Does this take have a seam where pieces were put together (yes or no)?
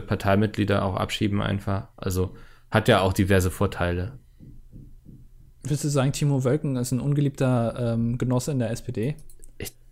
no